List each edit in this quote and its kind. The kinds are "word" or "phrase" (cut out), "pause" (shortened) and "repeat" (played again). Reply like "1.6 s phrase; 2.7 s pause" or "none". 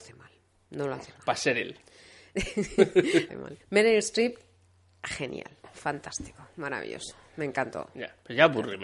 3.3 s phrase; 3.6 s pause